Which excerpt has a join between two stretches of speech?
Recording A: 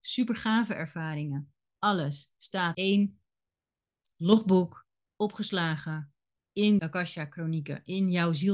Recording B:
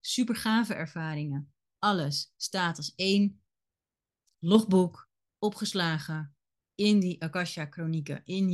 A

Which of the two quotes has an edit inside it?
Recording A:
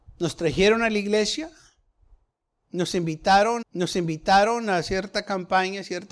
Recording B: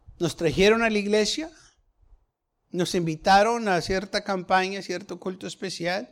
A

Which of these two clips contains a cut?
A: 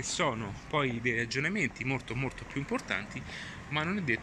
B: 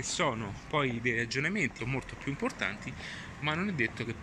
B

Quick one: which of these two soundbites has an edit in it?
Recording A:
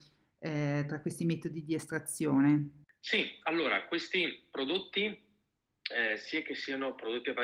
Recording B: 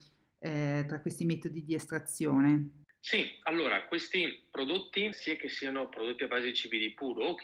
B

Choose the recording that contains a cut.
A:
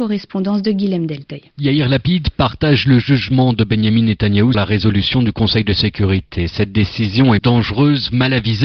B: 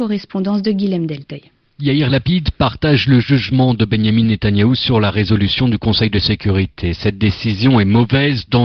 A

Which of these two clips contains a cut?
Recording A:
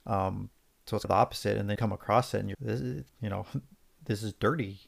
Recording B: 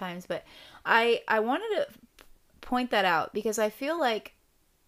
A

